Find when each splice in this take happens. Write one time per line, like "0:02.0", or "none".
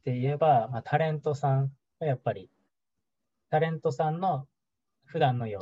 0:01.8